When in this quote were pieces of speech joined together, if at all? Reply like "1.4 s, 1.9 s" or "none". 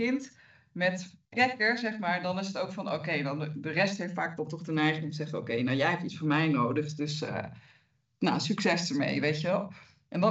1.2 s